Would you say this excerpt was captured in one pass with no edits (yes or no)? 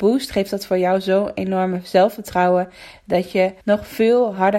no